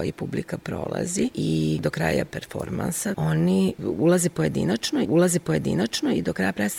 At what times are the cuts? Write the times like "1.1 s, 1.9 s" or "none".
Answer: 5.0 s